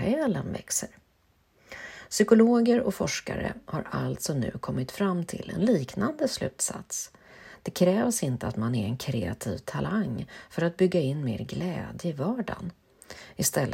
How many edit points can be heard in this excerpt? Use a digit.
0